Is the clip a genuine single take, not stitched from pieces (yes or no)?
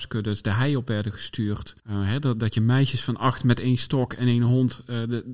no